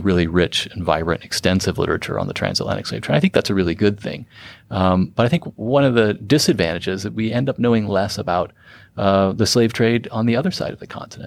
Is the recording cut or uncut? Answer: uncut